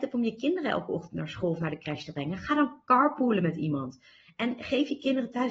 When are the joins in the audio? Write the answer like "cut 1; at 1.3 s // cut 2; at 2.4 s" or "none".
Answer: none